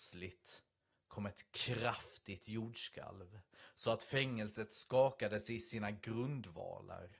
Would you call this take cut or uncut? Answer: uncut